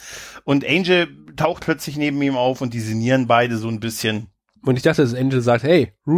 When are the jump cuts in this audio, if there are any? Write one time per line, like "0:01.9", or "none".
0:01.6